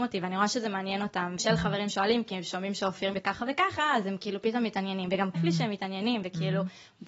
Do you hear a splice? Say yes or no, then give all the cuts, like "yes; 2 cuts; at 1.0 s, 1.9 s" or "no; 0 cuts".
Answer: yes; 3 cuts; at 1.4 s, 3.1 s, 5.3 s